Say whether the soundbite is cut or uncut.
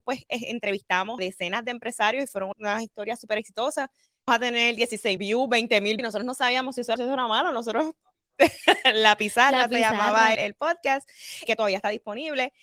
cut